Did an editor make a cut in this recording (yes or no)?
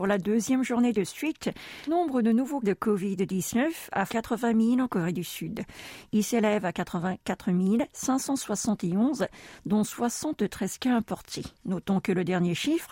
yes